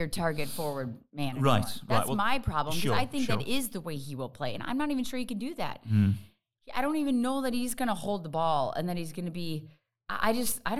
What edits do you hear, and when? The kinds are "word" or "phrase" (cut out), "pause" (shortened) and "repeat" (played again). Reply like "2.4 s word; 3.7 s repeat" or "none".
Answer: none